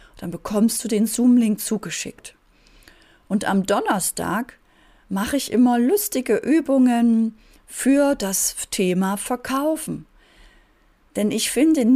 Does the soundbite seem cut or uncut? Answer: uncut